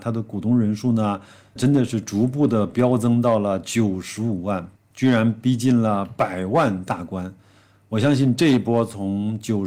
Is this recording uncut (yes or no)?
no